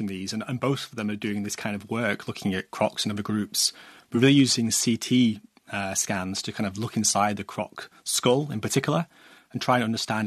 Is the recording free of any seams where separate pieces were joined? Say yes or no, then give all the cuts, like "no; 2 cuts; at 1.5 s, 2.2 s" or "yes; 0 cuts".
yes; 0 cuts